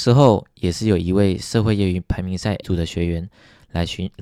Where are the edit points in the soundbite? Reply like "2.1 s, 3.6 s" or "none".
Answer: 2.6 s